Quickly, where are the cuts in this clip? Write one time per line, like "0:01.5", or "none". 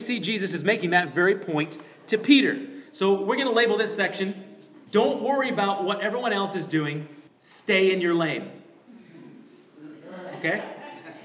0:04.9
0:07.3